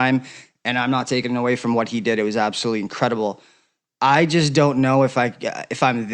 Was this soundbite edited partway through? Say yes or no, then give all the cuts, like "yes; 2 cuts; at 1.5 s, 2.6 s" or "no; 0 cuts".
no; 0 cuts